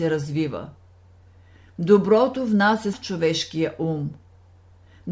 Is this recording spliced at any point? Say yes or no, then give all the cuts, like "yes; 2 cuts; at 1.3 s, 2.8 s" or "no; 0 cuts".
yes; 1 cut; at 2.9 s